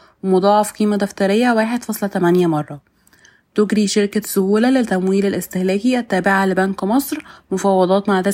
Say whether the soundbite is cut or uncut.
uncut